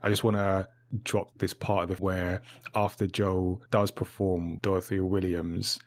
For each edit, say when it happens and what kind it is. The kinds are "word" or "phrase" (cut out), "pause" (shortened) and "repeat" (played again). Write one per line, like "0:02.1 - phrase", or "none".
0:01.3 - word
0:02.0 - word
0:03.7 - pause
0:04.6 - word